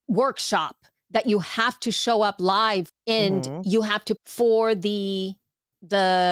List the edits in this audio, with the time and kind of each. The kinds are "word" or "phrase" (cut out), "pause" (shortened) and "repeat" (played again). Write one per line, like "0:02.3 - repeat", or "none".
0:02.9 - word
0:04.2 - word